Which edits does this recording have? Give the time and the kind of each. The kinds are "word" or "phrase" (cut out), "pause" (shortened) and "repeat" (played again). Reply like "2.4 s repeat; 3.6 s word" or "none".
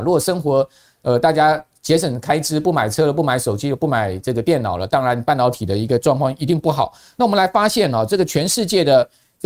none